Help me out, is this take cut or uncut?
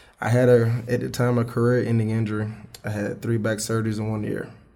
uncut